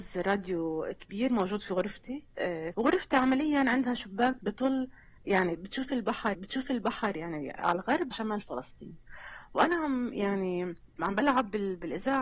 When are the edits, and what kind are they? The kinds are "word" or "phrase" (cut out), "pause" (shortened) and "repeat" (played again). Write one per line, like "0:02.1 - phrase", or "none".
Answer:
0:02.7 - phrase
0:06.3 - repeat
0:08.1 - phrase
0:11.0 - word